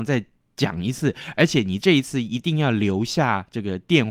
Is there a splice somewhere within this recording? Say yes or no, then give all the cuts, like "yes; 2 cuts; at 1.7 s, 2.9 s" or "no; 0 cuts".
no; 0 cuts